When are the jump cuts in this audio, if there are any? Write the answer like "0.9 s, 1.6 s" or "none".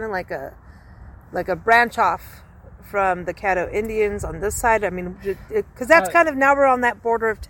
none